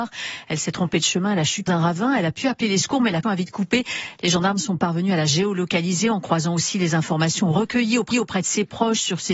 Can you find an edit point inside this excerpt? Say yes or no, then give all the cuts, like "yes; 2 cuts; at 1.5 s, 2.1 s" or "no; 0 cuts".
yes; 3 cuts; at 1.7 s, 3.2 s, 8.1 s